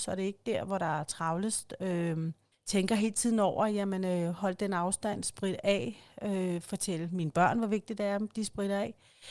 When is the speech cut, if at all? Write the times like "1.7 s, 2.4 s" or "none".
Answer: 2.5 s